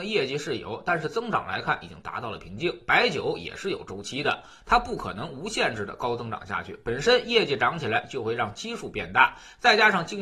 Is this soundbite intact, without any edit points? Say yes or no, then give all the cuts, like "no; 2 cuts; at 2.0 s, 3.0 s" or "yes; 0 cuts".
yes; 0 cuts